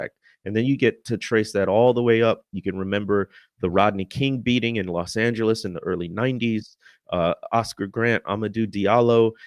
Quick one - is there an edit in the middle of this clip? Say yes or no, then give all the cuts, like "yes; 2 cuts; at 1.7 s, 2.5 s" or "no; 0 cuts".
no; 0 cuts